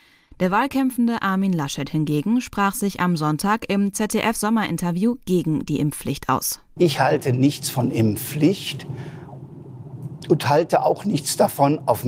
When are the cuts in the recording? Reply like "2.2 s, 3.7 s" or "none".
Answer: none